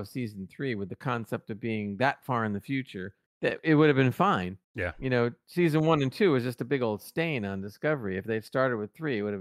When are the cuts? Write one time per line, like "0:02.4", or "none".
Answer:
0:03.3
0:04.6